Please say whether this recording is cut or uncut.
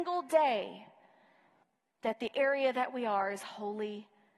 cut